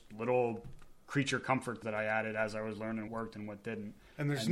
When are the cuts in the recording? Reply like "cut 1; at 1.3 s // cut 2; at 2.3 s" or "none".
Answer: cut 1; at 1.8 s // cut 2; at 3.1 s